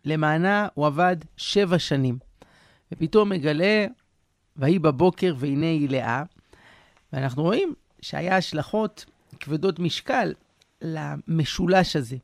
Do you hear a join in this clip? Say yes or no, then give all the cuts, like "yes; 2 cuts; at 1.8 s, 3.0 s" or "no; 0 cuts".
no; 0 cuts